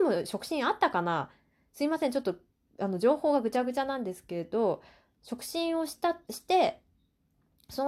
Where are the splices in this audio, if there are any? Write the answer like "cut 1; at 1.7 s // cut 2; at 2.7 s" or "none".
cut 1; at 6.2 s